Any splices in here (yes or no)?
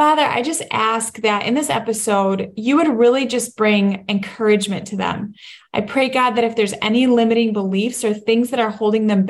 no